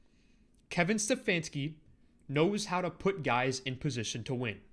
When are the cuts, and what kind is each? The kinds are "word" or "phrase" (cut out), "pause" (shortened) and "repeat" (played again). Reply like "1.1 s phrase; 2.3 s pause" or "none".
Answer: none